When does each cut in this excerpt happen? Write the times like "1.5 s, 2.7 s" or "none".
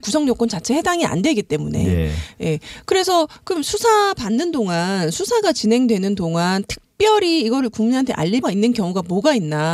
8.4 s